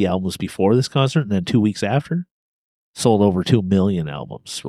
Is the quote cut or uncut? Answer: uncut